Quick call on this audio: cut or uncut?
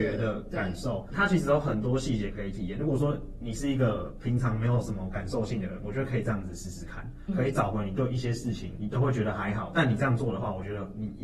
cut